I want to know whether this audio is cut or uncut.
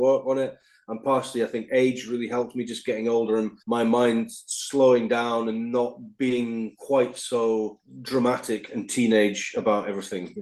cut